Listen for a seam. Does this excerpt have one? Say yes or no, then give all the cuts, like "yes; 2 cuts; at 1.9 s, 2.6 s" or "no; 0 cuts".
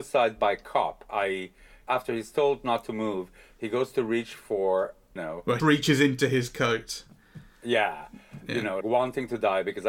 yes; 3 cuts; at 5.2 s, 5.6 s, 8.8 s